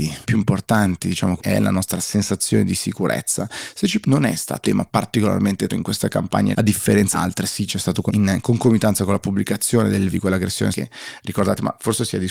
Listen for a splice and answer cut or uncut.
cut